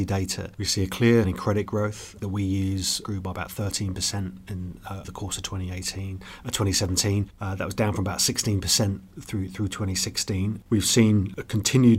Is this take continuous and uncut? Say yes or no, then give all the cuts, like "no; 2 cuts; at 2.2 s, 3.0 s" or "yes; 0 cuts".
no; 3 cuts; at 1.2 s, 2.2 s, 5.0 s